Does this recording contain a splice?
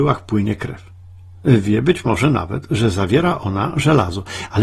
no; 0 cuts

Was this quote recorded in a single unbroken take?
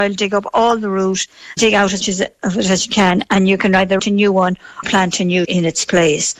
no; 5 cuts; at 1.6 s, 2.0 s, 4.0 s, 4.8 s, 5.4 s

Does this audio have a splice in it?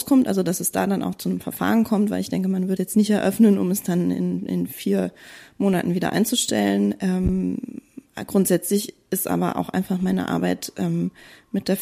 yes; 1 cut; at 2.8 s

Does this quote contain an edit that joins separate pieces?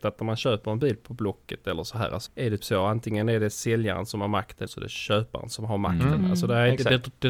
yes; 3 cuts; at 2.3 s, 2.6 s, 4.7 s

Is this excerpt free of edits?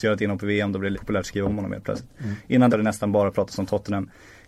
no; 2 cuts; at 0.9 s, 2.7 s

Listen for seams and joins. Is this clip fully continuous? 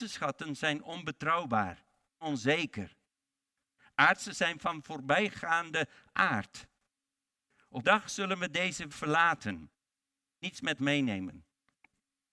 no; 6 cuts; at 2.2 s, 4.3 s, 7.8 s, 8.9 s, 10.4 s, 10.8 s

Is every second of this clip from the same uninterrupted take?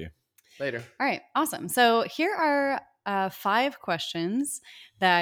yes; 0 cuts

